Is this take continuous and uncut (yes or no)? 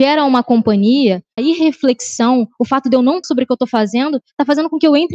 no